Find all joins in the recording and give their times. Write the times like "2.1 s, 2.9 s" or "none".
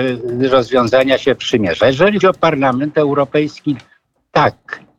2.2 s